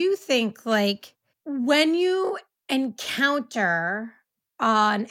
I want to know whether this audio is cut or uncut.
uncut